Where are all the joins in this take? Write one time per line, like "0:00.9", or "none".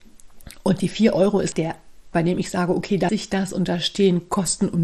0:01.5
0:02.1
0:03.1